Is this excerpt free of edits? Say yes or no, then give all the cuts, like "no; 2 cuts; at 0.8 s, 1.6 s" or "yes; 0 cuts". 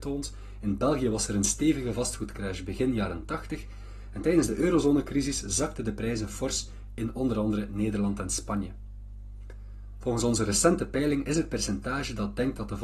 yes; 0 cuts